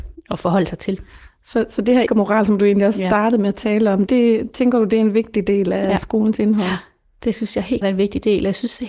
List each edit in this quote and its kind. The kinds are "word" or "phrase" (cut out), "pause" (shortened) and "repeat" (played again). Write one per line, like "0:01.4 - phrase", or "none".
0:02.1 - word
0:04.1 - word
0:07.8 - word